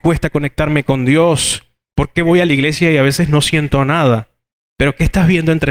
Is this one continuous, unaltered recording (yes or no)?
yes